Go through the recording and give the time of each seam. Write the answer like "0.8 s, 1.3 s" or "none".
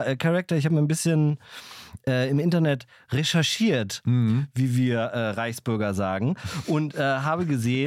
none